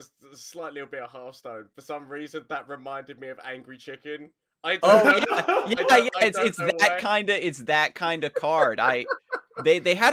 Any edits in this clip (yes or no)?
no